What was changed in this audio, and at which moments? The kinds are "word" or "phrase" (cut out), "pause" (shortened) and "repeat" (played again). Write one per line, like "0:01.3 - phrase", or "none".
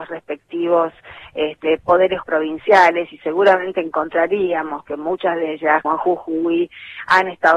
0:02.2 - word
0:05.8 - word